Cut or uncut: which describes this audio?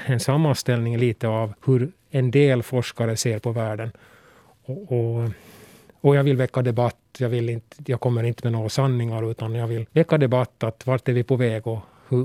cut